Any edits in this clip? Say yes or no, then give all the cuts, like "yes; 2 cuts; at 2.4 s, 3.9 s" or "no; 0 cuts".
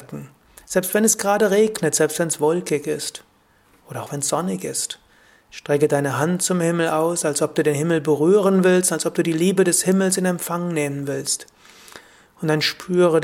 no; 0 cuts